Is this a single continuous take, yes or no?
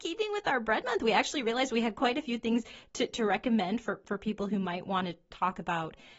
yes